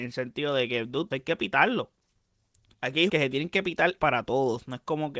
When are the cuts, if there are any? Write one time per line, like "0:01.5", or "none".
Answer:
0:01.1
0:02.7
0:03.1
0:04.0